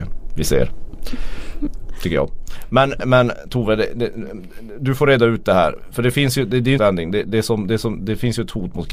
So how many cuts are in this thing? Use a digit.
2